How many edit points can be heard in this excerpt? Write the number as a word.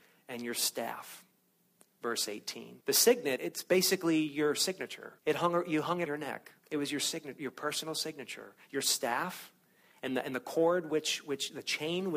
five